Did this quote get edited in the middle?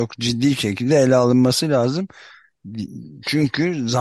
no; 0 cuts

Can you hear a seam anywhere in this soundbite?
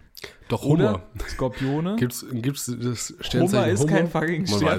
no; 0 cuts

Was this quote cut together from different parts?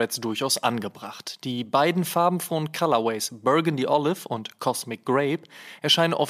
no; 0 cuts

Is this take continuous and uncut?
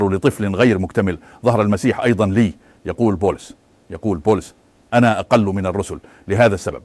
yes; 0 cuts

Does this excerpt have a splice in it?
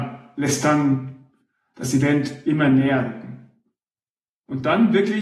no; 0 cuts

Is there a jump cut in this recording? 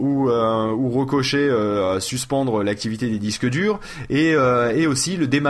no; 0 cuts

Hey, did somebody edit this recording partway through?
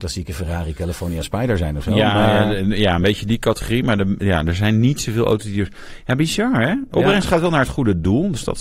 no; 0 cuts

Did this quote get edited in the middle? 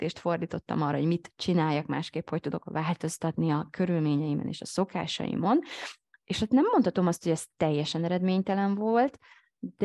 no; 0 cuts

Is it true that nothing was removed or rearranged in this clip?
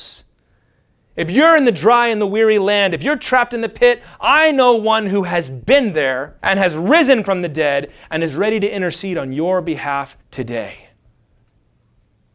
no; 2 cuts; at 6.4 s, 10.2 s

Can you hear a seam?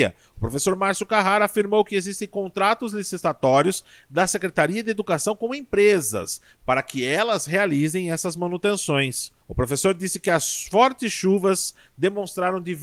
yes; 1 cut; at 9.4 s

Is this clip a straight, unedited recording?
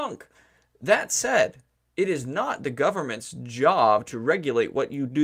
yes; 0 cuts

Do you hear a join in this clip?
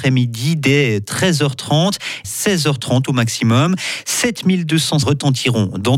yes; 2 cuts; at 2.2 s, 5.0 s

